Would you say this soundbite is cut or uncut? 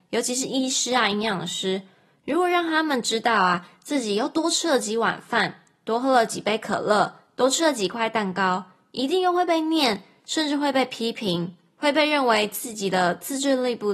uncut